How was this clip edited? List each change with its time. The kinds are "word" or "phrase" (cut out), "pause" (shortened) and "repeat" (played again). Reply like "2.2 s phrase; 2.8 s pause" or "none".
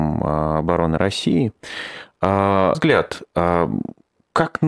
2.7 s word